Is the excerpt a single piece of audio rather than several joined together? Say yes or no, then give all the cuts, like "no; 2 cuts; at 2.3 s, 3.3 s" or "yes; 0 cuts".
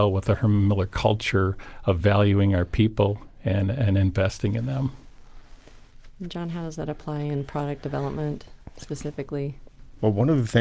yes; 0 cuts